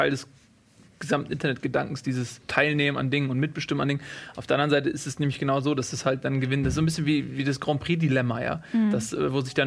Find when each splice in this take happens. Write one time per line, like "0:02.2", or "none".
0:02.4